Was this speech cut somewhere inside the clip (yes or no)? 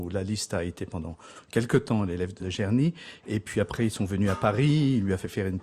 yes